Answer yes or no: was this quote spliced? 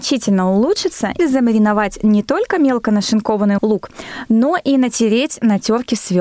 yes